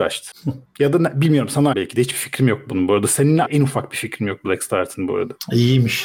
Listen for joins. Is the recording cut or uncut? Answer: cut